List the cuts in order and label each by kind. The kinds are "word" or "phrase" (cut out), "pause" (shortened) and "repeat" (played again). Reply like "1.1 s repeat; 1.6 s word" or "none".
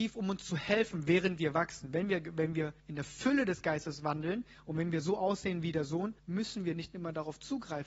2.8 s pause; 6.2 s pause

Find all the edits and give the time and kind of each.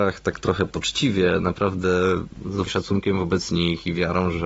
2.7 s word

